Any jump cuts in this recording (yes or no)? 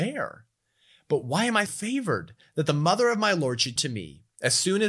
yes